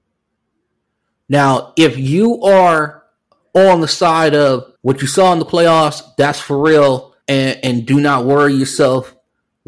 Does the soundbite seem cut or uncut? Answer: cut